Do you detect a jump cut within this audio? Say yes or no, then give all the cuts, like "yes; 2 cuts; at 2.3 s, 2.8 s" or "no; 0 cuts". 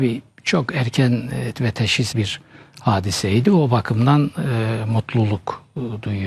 yes; 2 cuts; at 1.5 s, 2.1 s